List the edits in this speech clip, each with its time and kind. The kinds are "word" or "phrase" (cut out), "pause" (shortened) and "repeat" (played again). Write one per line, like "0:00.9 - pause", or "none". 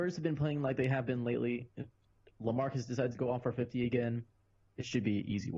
none